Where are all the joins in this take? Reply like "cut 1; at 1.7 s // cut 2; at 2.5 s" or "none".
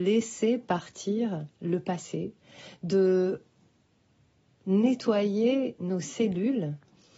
none